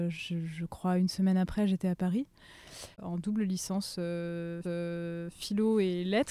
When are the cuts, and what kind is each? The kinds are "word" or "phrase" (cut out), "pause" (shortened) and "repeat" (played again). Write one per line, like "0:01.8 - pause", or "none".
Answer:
0:02.9 - pause
0:04.6 - repeat